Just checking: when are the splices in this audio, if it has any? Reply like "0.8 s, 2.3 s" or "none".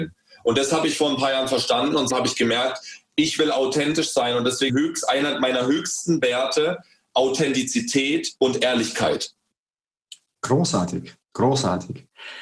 2.1 s, 4.7 s, 8.4 s, 11.2 s